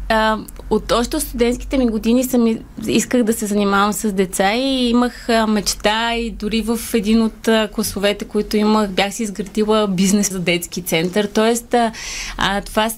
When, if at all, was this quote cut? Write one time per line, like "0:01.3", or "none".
0:10.3